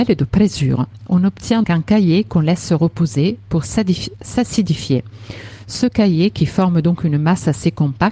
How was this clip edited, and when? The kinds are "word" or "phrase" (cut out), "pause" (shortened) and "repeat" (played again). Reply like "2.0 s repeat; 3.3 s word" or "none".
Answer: 1.6 s word